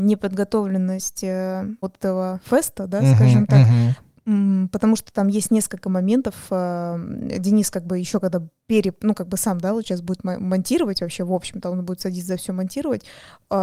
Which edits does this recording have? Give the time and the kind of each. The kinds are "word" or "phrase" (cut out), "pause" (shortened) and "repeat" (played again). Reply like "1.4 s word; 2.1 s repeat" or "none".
1.8 s word